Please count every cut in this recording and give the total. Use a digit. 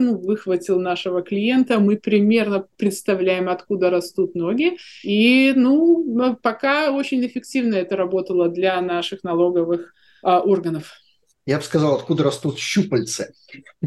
0